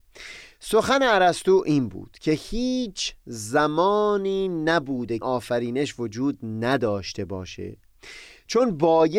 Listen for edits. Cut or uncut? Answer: cut